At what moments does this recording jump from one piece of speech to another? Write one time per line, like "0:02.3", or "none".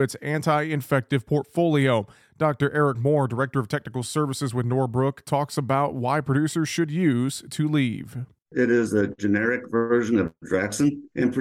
none